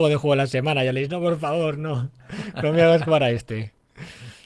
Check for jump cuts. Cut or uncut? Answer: uncut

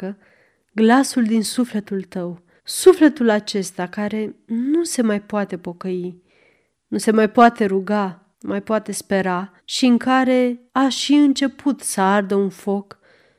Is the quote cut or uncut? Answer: cut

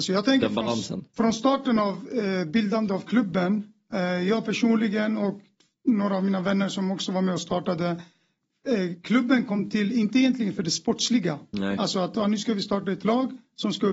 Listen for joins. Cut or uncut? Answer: uncut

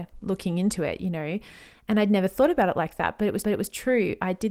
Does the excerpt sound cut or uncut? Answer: cut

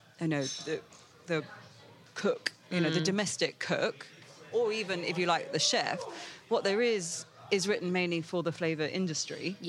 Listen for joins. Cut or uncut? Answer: uncut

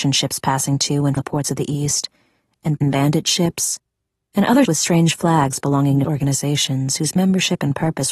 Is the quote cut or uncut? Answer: cut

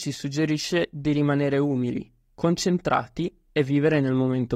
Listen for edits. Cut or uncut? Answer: uncut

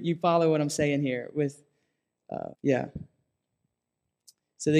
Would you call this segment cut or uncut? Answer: cut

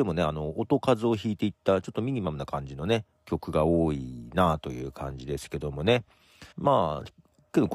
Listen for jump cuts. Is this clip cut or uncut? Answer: cut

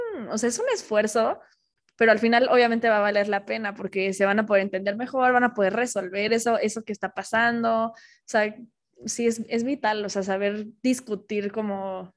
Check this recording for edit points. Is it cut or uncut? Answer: uncut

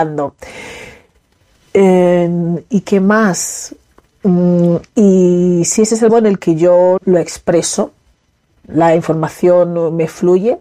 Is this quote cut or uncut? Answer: cut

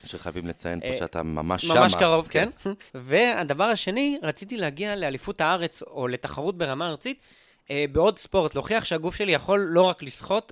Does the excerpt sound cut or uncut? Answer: cut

